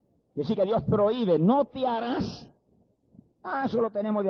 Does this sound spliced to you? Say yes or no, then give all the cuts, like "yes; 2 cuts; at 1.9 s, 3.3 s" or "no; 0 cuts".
no; 0 cuts